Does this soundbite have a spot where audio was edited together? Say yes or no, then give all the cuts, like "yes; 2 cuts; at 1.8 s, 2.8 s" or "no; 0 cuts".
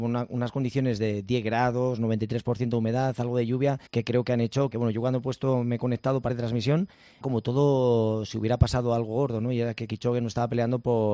yes; 4 cuts; at 3.9 s, 4.7 s, 6.3 s, 7.2 s